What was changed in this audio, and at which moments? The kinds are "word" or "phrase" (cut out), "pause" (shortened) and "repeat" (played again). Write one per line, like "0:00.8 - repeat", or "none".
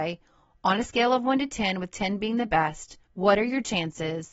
0:03.0 - pause